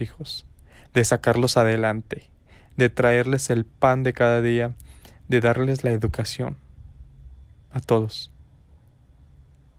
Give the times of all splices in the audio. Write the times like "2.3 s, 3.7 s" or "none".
none